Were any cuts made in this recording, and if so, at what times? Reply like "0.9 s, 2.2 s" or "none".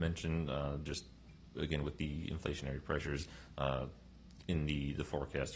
none